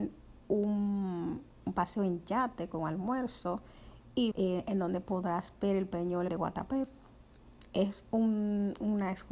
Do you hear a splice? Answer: yes; 2 cuts; at 4.3 s, 6.3 s

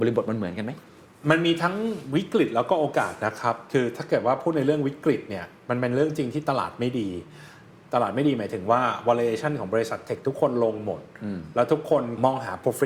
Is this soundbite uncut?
yes; 0 cuts

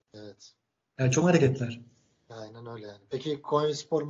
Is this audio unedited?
no; 1 cut; at 1.2 s

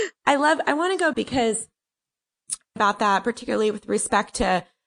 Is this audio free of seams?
no; 2 cuts; at 1.1 s, 2.8 s

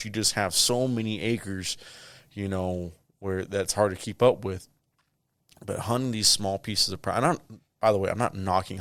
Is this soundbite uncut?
yes; 0 cuts

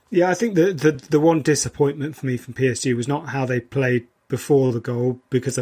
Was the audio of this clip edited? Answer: no; 0 cuts

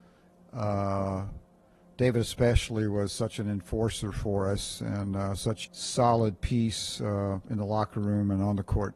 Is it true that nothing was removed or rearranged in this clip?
no; 1 cut; at 5.6 s

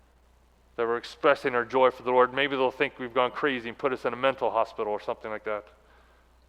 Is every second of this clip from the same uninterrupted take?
yes; 0 cuts

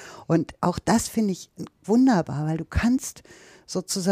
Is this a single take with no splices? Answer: no; 1 cut; at 1.8 s

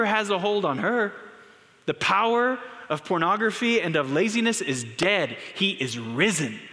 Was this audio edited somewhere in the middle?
no; 0 cuts

